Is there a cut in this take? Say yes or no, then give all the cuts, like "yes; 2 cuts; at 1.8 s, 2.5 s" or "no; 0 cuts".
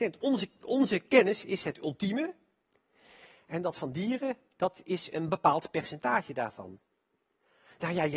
no; 0 cuts